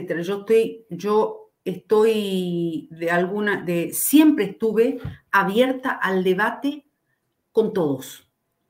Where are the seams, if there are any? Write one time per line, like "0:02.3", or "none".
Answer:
none